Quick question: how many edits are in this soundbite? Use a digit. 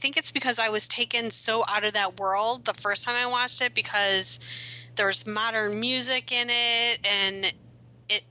1